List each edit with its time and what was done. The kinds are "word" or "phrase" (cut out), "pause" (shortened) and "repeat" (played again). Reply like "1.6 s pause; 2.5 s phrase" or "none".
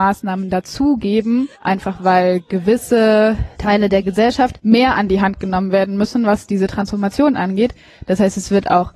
none

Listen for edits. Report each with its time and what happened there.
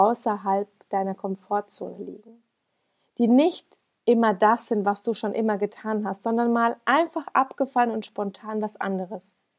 none

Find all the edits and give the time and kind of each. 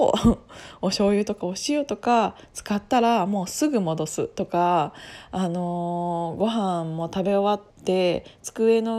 7.7 s pause

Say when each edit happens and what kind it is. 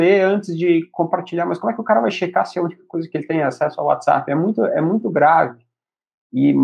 none

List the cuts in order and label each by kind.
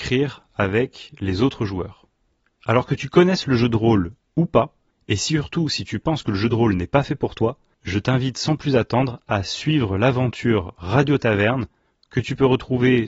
none

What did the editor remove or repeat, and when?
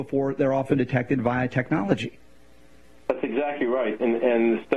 none

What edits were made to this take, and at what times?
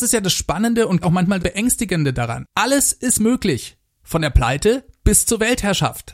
1.0 s word; 1.4 s word; 2.5 s pause

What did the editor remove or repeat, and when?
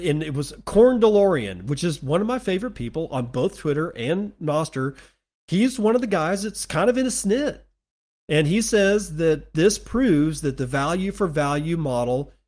none

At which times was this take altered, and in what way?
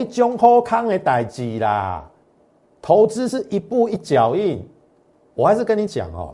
none

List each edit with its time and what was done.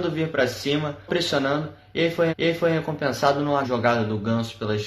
1.1 s word; 2.3 s repeat; 3.6 s word

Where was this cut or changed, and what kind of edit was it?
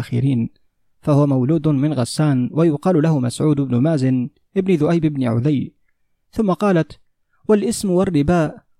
none

